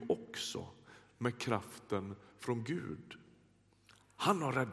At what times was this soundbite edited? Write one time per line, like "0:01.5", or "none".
none